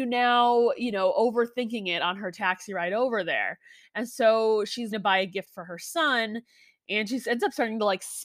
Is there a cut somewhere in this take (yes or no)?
yes